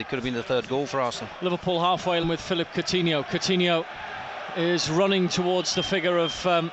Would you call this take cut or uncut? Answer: cut